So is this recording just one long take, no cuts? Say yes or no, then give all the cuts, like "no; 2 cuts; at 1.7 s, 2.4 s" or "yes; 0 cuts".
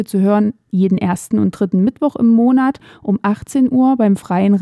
yes; 0 cuts